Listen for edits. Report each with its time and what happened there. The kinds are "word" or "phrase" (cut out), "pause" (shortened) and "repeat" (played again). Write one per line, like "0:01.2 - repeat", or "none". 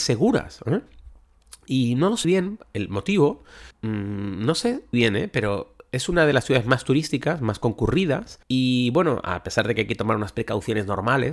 0:02.2 - word
0:03.7 - pause
0:04.9 - word
0:08.4 - pause